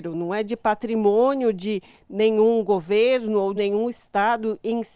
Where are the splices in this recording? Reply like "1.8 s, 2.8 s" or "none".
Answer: 3.6 s